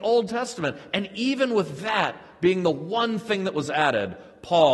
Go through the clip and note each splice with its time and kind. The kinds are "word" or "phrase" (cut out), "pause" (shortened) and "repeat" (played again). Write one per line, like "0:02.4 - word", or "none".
none